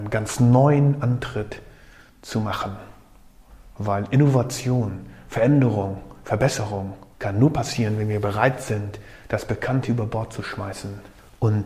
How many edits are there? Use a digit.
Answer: 0